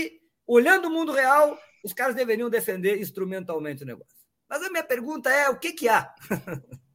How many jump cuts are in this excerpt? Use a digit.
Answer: 0